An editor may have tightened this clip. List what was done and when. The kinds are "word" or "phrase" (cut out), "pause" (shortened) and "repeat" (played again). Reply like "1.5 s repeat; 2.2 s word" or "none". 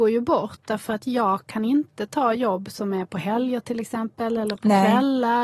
none